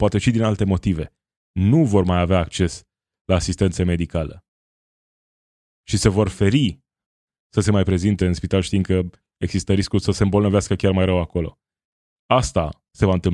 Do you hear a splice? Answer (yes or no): no